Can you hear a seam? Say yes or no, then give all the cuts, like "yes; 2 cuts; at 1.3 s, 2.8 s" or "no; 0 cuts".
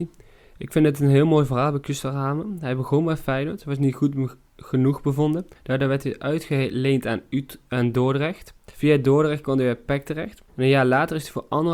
yes; 3 cuts; at 5.6 s, 8.7 s, 10.5 s